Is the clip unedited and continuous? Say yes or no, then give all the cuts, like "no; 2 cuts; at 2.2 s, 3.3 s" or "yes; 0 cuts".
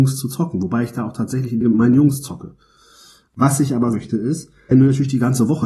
no; 3 cuts; at 1.6 s, 3.9 s, 4.7 s